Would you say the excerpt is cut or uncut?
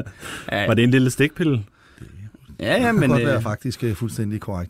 uncut